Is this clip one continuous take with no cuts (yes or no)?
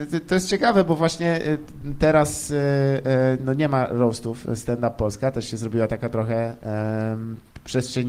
yes